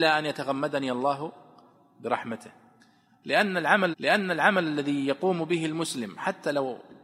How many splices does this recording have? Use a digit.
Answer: 1